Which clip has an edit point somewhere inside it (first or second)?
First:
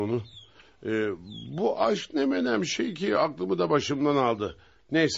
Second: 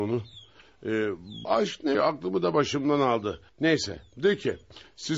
second